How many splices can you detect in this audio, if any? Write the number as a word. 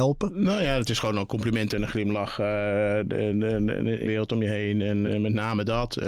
three